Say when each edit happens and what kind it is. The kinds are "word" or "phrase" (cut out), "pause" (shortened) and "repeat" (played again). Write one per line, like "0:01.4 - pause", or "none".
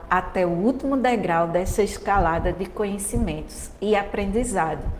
none